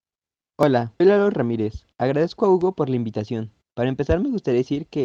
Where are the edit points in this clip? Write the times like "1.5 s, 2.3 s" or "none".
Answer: 1.0 s